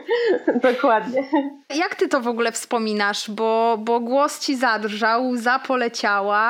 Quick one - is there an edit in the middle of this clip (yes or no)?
no